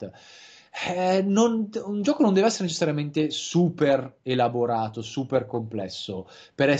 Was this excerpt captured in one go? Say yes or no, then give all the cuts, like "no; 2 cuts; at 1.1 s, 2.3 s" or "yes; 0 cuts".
yes; 0 cuts